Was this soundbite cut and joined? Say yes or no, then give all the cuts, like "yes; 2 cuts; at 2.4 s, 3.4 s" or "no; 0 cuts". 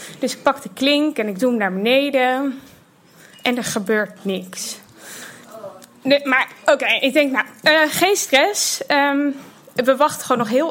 no; 0 cuts